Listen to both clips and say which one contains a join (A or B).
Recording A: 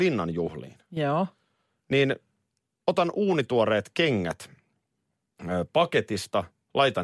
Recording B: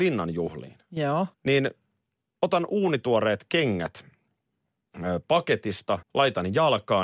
B